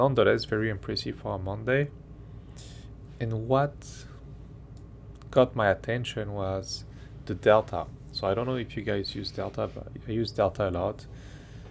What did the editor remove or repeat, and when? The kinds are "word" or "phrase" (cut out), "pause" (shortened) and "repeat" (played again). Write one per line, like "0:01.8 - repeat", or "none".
none